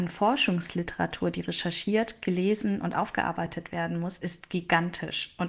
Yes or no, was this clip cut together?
no